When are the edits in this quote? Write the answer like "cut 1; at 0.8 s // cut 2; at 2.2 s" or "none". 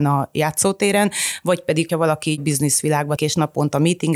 cut 1; at 1.9 s // cut 2; at 3.2 s